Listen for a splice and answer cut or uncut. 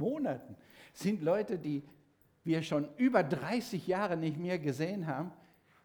uncut